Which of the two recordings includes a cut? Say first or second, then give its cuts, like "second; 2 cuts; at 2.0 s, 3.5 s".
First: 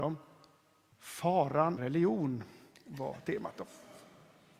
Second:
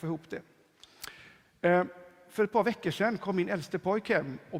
first; 1 cut; at 1.8 s